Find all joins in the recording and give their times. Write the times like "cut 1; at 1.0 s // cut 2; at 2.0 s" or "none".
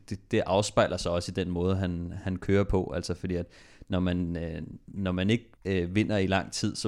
cut 1; at 5.6 s

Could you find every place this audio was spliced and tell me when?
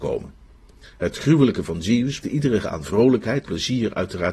cut 1; at 1.7 s // cut 2; at 2.2 s // cut 3; at 2.6 s // cut 4; at 3.4 s

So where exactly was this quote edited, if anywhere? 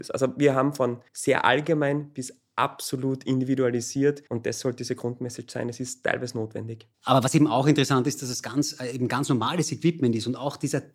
cut 1; at 1.1 s // cut 2; at 4.3 s // cut 3; at 6.9 s

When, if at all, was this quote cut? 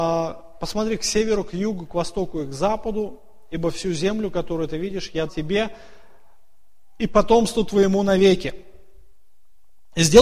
cut 1; at 5.3 s

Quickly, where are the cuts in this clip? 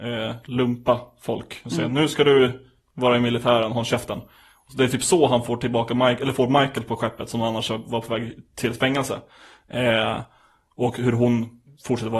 none

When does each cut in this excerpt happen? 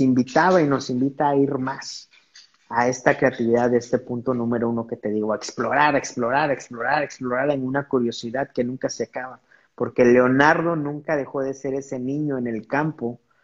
none

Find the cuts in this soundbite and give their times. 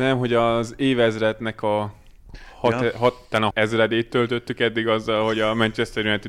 cut 1; at 3.5 s

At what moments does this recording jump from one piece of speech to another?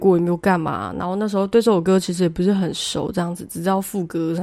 none

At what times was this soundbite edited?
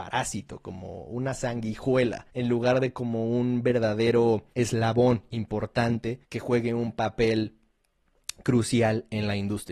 cut 1; at 2.3 s // cut 2; at 4.5 s // cut 3; at 6.2 s

